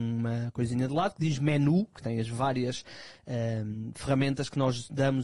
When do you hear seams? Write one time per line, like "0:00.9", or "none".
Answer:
none